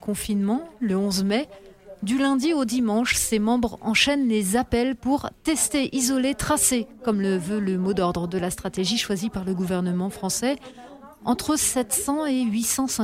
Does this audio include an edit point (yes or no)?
no